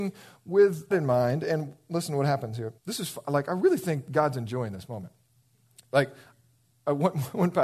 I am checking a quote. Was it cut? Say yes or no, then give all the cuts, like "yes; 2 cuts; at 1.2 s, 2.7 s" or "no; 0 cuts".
yes; 2 cuts; at 0.9 s, 2.8 s